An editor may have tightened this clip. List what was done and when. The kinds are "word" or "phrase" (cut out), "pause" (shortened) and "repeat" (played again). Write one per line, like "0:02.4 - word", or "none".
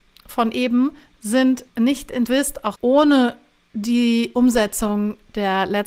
0:01.7 - pause
0:02.3 - phrase
0:02.8 - word